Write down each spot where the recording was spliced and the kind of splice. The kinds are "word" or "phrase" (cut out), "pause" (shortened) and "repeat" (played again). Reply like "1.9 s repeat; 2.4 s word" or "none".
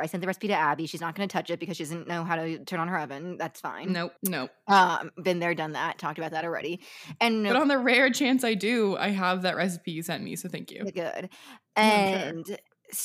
4.2 s pause; 10.9 s word